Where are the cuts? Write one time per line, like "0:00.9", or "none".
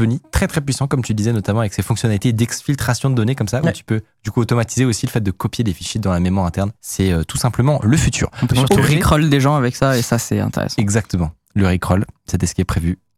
0:06.8